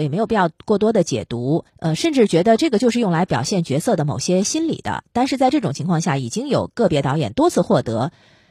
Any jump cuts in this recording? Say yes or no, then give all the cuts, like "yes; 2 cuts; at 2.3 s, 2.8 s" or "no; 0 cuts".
yes; 1 cut; at 1.7 s